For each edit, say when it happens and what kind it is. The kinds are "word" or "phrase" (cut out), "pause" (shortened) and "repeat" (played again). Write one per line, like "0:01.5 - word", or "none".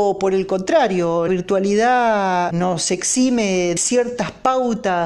0:01.3 - word
0:02.5 - word
0:03.8 - word